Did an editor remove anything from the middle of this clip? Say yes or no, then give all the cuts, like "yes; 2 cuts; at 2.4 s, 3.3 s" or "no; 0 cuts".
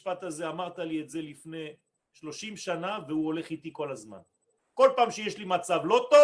no; 0 cuts